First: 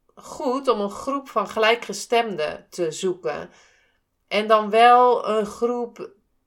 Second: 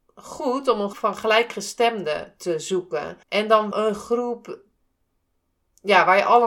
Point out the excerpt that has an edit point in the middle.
second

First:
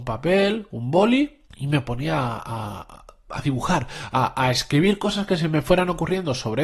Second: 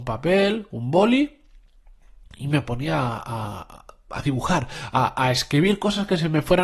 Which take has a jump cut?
first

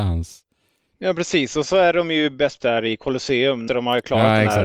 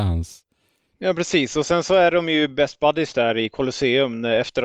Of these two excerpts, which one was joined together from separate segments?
first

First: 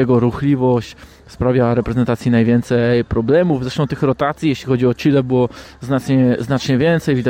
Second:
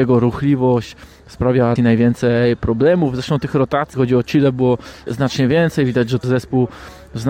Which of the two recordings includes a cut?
second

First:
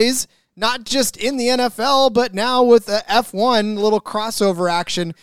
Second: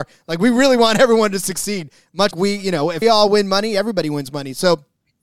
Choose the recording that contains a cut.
second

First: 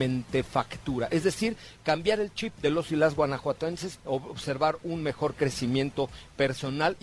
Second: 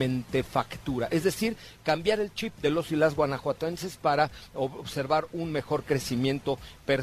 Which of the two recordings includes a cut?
first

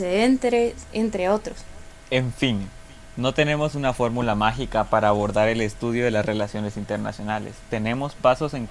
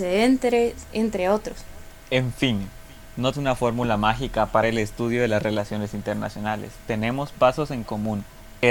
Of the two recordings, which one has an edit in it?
second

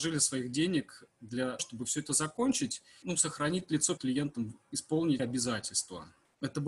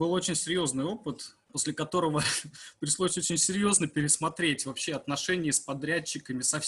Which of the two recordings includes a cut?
first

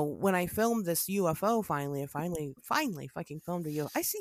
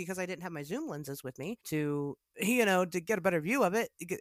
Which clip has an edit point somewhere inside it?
second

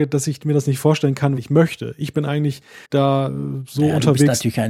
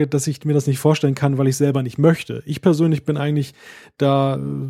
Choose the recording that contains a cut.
first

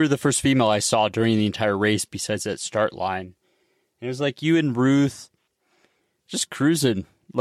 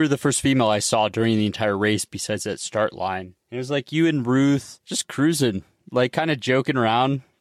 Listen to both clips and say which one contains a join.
second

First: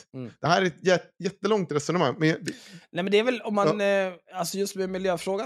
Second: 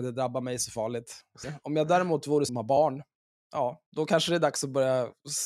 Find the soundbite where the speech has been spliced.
second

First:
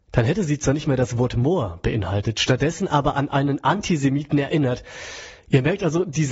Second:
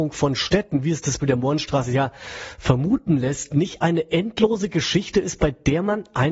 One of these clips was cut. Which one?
second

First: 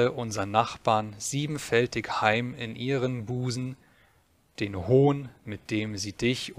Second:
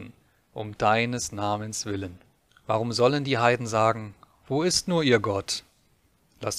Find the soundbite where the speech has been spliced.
second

